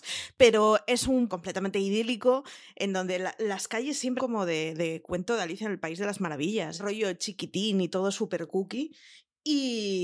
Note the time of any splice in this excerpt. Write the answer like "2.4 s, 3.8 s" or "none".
1.3 s, 4.2 s, 6.8 s